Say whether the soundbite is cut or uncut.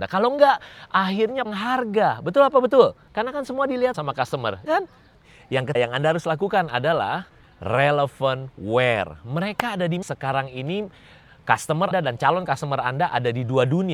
cut